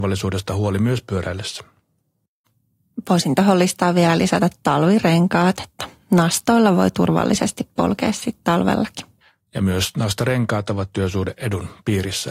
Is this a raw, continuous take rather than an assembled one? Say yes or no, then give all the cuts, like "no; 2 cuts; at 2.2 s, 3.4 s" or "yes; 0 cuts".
yes; 0 cuts